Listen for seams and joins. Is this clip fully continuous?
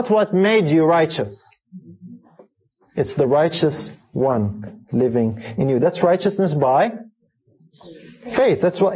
yes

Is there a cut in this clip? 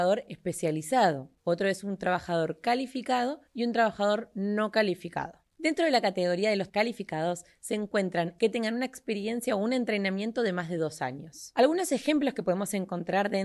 yes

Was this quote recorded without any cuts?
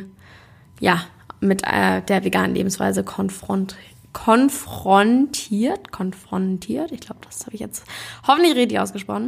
yes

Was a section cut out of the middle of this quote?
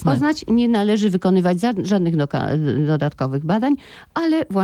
no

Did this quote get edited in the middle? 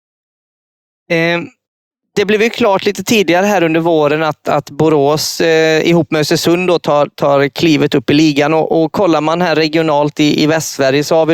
no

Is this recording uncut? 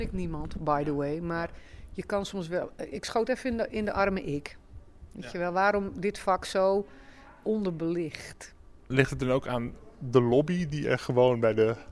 yes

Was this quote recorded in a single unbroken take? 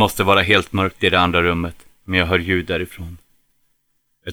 yes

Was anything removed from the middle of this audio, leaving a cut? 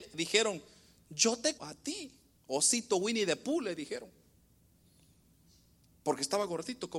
yes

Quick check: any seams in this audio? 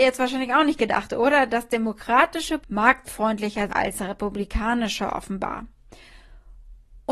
yes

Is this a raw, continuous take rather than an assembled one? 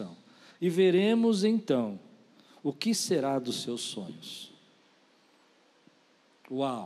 yes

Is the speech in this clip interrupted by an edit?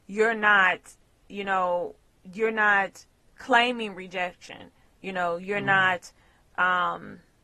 no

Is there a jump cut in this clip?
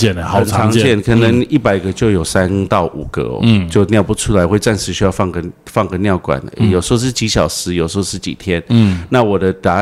no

